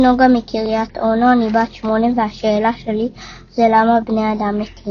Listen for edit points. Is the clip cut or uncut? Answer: uncut